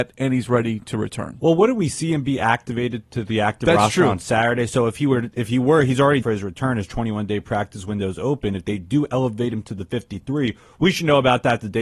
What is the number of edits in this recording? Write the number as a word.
one